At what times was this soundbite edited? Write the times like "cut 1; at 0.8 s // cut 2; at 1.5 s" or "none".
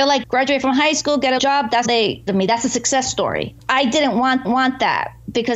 cut 1; at 1.4 s // cut 2; at 1.8 s // cut 3; at 2.3 s // cut 4; at 4.4 s